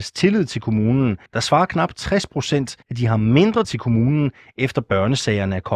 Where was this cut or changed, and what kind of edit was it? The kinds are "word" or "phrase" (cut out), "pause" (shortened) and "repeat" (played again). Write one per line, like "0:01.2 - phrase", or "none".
0:01.3 - pause
0:02.8 - pause
0:03.6 - word